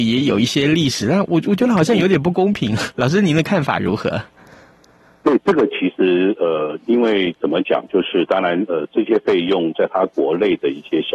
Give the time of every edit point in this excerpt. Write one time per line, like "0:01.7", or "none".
none

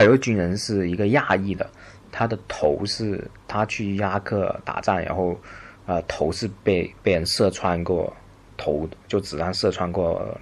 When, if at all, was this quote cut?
none

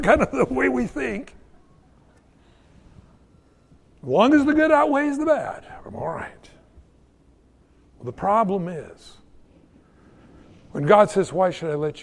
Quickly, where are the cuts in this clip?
none

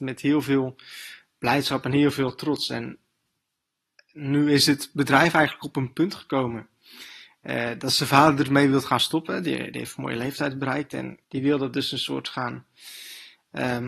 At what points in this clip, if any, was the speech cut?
0:11.2

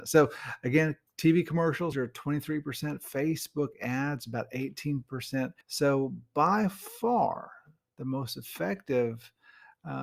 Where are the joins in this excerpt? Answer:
0:01.9
0:05.6

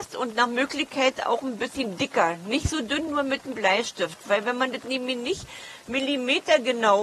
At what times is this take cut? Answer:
none

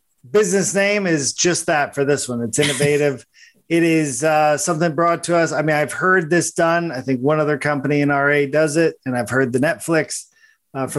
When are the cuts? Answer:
none

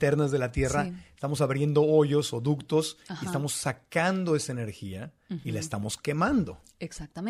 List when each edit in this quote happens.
none

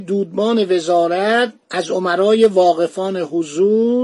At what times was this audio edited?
none

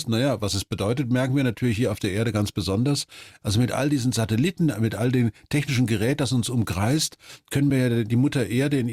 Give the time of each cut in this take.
none

